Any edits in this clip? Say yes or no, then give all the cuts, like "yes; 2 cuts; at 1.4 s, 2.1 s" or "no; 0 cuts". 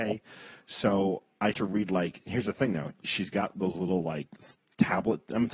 yes; 2 cuts; at 1.5 s, 4.3 s